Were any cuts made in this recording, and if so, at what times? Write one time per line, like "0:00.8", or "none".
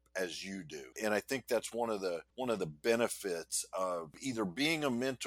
0:00.9
0:02.3